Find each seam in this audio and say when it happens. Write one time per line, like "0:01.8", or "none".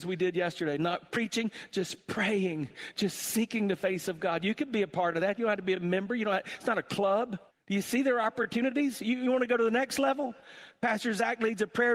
0:07.5